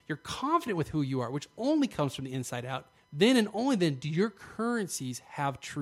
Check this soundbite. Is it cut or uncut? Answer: cut